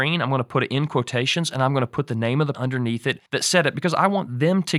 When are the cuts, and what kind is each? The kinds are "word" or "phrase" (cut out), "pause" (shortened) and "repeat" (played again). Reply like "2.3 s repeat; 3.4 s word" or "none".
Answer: 2.5 s word; 3.3 s pause